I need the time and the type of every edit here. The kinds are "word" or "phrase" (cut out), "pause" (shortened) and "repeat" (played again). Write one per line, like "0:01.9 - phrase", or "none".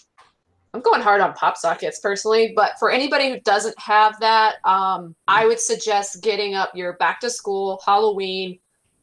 0:05.2 - pause